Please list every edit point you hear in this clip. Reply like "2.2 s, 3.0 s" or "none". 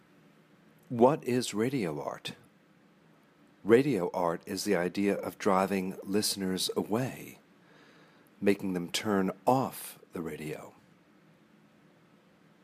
none